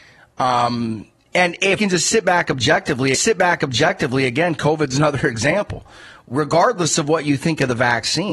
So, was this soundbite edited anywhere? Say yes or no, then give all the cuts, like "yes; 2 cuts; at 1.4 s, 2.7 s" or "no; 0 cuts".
yes; 2 cuts; at 1.8 s, 3.1 s